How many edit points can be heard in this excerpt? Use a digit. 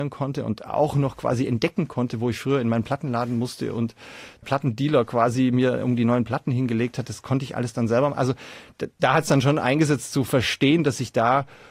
1